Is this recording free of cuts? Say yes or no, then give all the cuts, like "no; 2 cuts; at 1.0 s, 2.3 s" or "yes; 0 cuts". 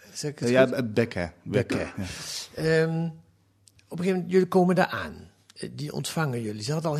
yes; 0 cuts